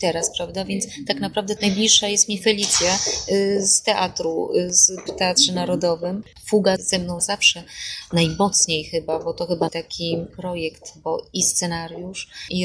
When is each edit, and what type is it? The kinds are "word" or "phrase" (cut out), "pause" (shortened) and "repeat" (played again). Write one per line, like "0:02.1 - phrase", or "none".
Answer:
0:01.6 - word
0:05.1 - word
0:06.8 - word
0:07.2 - word
0:09.7 - word
0:10.3 - word